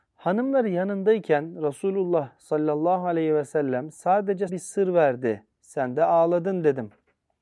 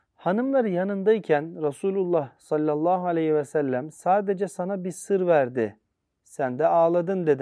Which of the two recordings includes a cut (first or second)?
first